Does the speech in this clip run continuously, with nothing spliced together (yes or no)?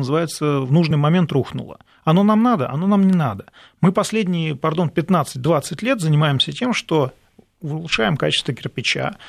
yes